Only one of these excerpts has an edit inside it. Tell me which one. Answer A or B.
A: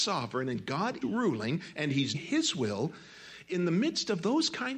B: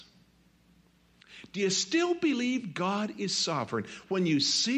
A